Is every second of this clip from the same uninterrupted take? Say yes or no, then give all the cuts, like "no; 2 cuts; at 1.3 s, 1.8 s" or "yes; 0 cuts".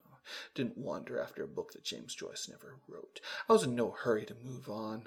yes; 0 cuts